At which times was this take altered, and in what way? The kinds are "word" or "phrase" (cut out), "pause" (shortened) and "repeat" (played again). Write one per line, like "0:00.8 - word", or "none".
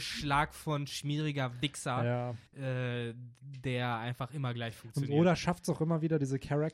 0:02.5 - pause